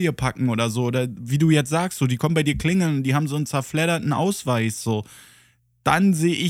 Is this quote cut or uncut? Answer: uncut